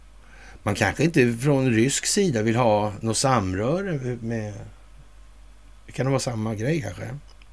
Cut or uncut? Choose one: uncut